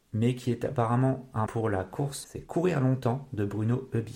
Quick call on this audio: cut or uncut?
cut